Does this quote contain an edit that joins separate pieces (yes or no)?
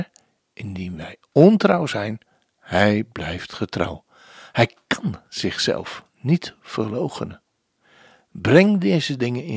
no